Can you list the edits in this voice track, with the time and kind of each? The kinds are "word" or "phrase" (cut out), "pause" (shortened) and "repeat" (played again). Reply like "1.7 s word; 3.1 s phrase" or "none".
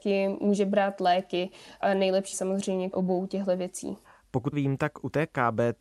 2.3 s word; 2.9 s word; 4.5 s word

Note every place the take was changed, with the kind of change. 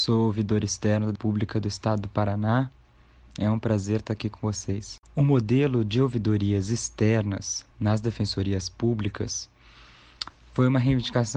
1.1 s word; 5.0 s pause; 7.7 s pause

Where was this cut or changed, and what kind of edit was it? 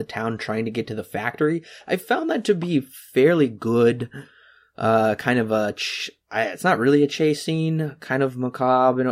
none

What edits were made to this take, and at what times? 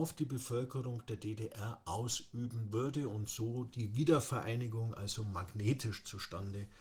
none

